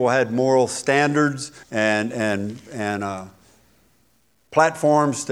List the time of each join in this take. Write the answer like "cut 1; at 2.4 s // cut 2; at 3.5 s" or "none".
cut 1; at 1.6 s